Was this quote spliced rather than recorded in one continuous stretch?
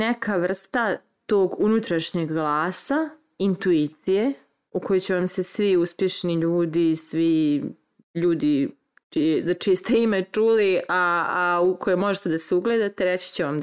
no; 0 cuts

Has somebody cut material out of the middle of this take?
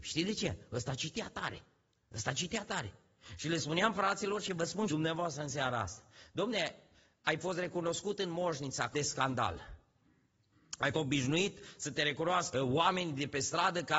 yes; 4 cuts; at 4.9 s, 8.9 s, 10.9 s, 12.5 s

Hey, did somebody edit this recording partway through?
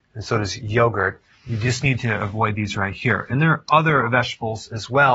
no; 0 cuts

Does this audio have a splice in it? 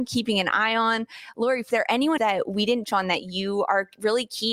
yes; 3 cuts; at 1.7 s, 2.2 s, 2.8 s

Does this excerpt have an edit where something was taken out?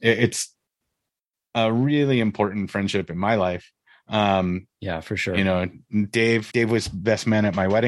yes; 1 cut; at 6.5 s

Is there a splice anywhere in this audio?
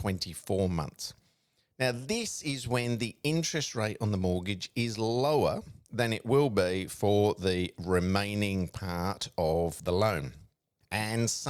no; 0 cuts

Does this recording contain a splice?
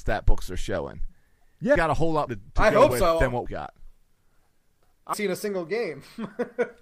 yes; 4 cuts; at 1.8 s, 2.3 s, 3.5 s, 5.1 s

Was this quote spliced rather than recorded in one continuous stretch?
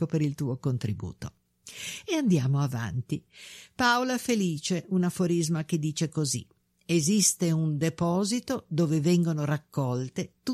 no; 0 cuts

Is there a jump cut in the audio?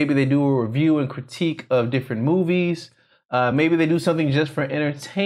no; 0 cuts

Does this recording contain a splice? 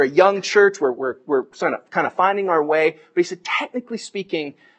no; 0 cuts

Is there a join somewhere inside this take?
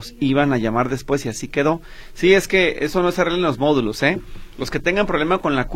no; 0 cuts

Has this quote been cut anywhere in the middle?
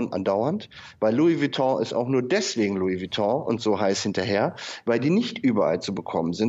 no; 0 cuts

